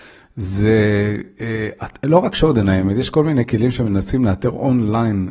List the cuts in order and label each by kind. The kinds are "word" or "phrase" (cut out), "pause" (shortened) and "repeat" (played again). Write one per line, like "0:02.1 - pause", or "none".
none

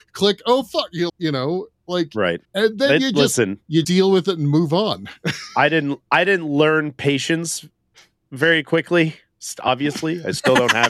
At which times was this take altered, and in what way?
0:01.1 - word
0:02.4 - pause
0:03.8 - word

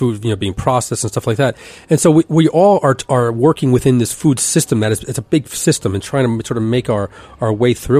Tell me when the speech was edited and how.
none

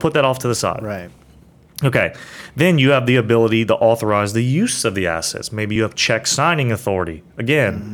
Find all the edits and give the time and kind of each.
none

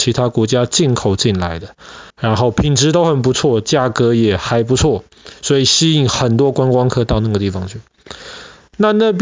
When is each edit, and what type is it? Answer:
0:02.1 - pause

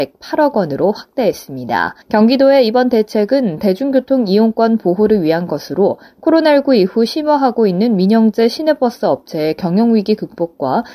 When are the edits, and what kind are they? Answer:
0:02.0 - pause

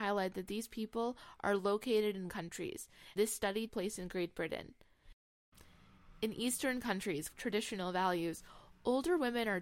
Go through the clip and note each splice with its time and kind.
0:02.3 - word
0:03.2 - word
0:03.7 - word
0:07.3 - word

